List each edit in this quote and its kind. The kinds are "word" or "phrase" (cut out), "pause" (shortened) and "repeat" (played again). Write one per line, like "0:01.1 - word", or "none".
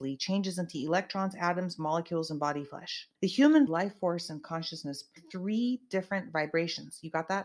0:03.2 - pause
0:03.7 - word
0:05.2 - word